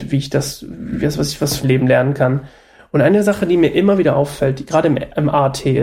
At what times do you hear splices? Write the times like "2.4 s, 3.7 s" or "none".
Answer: 1.6 s